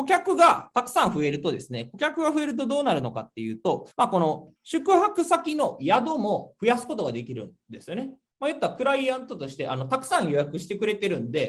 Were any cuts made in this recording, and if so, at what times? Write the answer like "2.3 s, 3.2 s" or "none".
3.9 s, 4.6 s